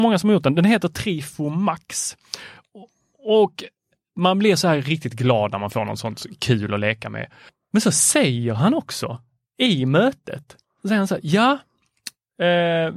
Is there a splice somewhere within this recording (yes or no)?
no